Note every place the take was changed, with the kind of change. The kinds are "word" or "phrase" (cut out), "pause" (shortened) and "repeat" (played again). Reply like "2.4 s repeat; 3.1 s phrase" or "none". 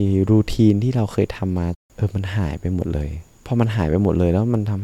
3.4 s pause